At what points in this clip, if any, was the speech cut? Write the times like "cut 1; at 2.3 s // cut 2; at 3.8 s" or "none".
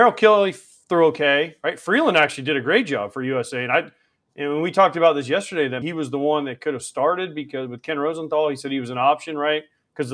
cut 1; at 5.8 s